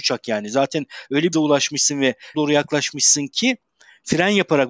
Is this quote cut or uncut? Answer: cut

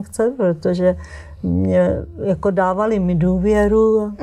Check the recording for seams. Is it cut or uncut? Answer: uncut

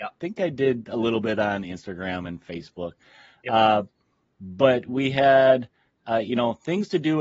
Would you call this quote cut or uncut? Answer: uncut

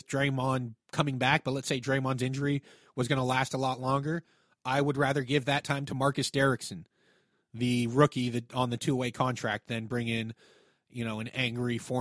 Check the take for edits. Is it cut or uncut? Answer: uncut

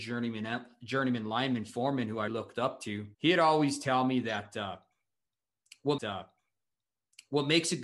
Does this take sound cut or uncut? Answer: cut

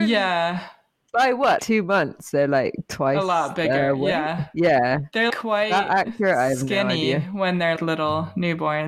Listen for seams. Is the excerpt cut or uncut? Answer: cut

